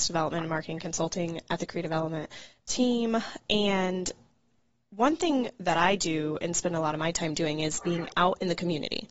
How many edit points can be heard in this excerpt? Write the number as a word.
zero